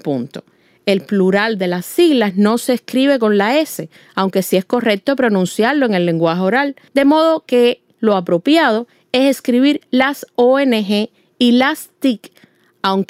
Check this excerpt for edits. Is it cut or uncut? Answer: uncut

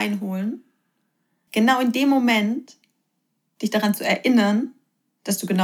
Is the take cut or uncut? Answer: uncut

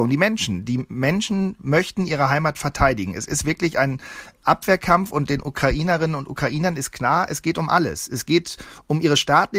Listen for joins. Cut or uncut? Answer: uncut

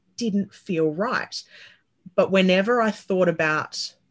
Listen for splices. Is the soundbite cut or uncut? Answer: uncut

